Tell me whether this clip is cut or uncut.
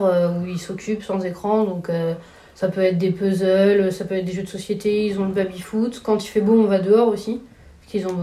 uncut